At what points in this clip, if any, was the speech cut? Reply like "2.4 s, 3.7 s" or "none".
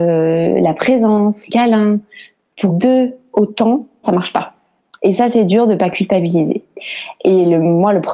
1.5 s, 2.7 s, 4.0 s